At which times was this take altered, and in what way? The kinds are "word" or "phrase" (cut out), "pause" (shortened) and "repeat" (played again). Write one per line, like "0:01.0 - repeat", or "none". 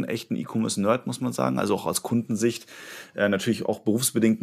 none